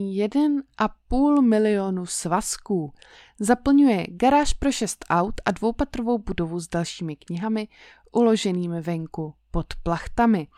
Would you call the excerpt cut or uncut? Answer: uncut